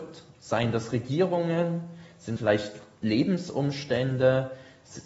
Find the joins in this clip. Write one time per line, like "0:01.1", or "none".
0:02.4